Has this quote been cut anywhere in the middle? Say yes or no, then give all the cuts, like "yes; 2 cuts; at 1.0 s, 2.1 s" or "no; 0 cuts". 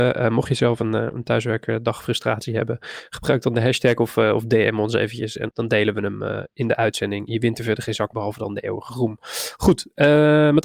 yes; 2 cuts; at 5.5 s, 8.1 s